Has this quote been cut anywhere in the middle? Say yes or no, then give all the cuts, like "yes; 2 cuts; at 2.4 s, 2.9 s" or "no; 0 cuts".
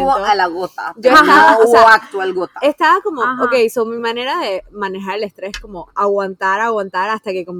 no; 0 cuts